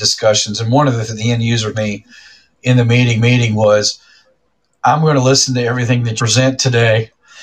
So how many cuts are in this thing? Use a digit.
4